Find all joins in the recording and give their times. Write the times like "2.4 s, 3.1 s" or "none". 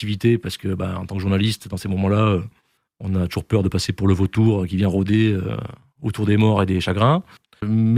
none

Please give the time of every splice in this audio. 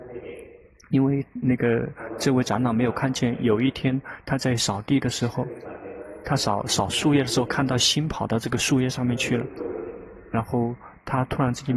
none

